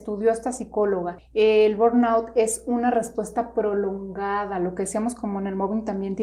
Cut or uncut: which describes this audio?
uncut